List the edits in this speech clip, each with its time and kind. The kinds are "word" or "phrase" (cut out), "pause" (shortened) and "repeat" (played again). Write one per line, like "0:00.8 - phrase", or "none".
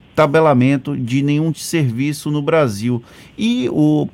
0:01.5 - word